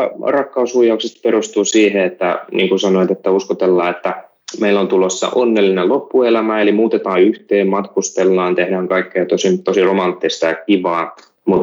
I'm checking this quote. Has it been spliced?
no; 0 cuts

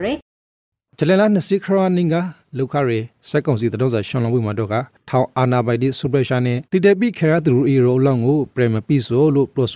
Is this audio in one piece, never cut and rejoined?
no; 1 cut; at 6.6 s

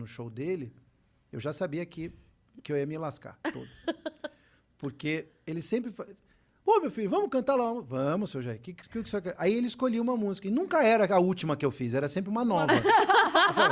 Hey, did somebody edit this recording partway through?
no; 0 cuts

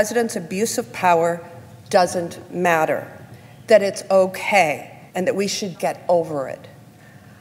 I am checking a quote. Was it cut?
yes; 2 cuts; at 5.1 s, 5.7 s

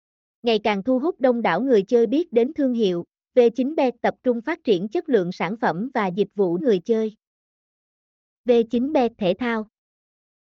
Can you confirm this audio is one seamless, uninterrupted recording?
no; 1 cut; at 6.6 s

